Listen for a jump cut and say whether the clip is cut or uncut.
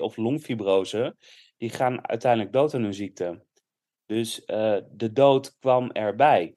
uncut